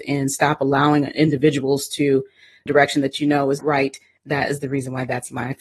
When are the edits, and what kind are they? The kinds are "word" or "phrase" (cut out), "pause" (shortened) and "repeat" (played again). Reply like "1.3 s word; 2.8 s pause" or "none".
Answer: 2.7 s phrase; 3.6 s word